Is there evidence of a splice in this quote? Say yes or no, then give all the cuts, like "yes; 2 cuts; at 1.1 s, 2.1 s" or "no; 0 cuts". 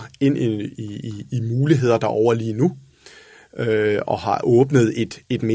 no; 0 cuts